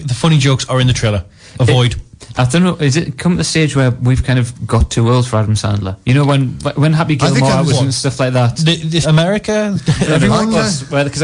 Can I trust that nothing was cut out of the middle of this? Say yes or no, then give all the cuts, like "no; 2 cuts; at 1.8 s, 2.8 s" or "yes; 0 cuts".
no; 1 cut; at 9.0 s